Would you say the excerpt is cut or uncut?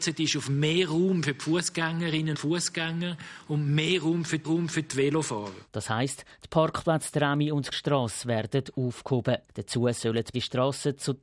cut